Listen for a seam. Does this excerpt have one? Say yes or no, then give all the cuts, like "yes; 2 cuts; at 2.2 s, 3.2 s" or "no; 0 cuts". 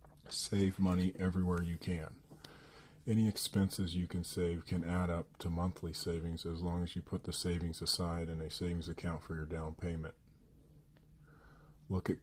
no; 0 cuts